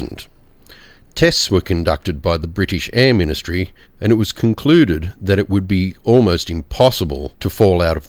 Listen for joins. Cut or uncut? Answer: cut